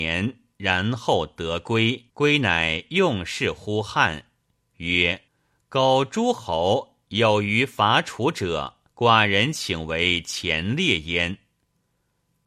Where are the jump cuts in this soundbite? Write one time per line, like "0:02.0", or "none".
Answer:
0:02.1
0:05.3
0:08.9